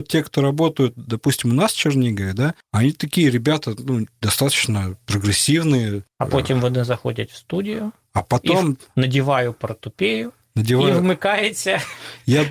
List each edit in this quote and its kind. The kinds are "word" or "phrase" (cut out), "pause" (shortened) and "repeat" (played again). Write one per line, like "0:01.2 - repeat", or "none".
none